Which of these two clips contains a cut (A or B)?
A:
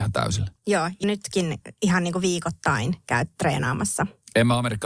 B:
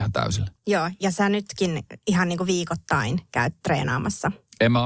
A